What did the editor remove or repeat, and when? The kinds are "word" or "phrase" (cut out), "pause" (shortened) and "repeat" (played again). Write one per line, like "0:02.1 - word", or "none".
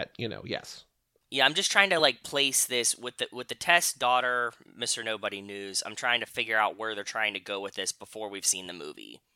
none